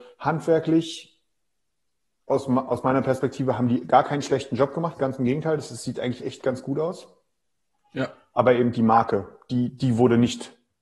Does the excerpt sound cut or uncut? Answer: uncut